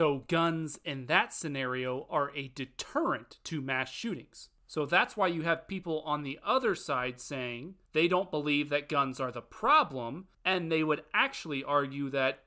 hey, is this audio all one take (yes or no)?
no